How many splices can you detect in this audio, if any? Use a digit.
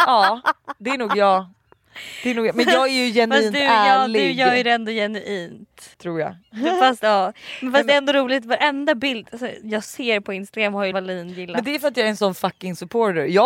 2